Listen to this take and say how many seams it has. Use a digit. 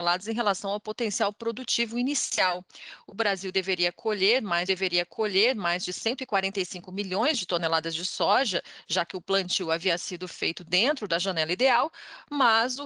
1